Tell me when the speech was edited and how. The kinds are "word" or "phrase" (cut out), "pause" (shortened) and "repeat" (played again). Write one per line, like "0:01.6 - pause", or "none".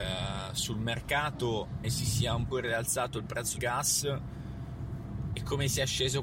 0:01.8 - word
0:02.5 - word
0:03.6 - word